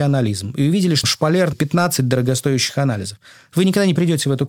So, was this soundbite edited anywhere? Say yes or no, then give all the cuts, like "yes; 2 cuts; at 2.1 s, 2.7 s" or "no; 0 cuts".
yes; 2 cuts; at 1.0 s, 1.5 s